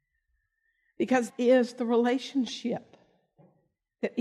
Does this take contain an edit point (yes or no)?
yes